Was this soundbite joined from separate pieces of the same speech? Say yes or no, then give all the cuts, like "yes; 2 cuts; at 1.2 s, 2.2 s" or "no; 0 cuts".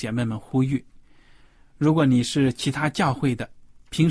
no; 0 cuts